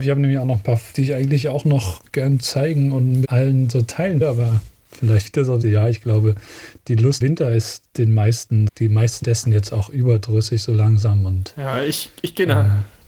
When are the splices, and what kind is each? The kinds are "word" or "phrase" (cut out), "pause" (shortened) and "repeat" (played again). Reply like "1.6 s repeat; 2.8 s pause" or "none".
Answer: 0.9 s word; 3.2 s word; 4.2 s word; 5.2 s word; 5.6 s word; 7.2 s word; 8.7 s word; 9.2 s word

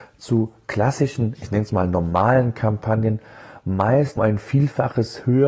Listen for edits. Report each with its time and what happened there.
4.2 s word

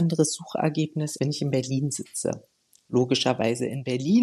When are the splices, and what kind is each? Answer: 1.2 s word

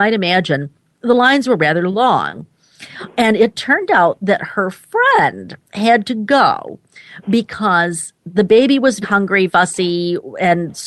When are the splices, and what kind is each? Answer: 9.0 s word; 9.5 s word

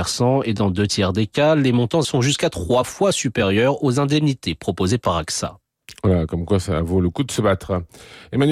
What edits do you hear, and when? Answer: 2.0 s word

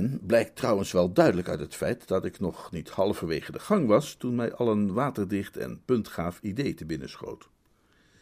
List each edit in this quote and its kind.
none

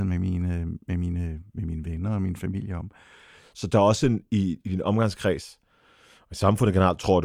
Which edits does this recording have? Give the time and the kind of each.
none

